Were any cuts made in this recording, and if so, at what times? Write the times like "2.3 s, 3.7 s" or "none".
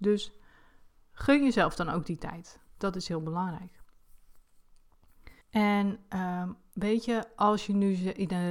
5.4 s